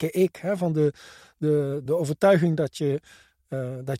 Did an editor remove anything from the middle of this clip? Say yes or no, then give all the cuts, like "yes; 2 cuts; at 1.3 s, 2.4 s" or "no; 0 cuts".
yes; 1 cut; at 1.9 s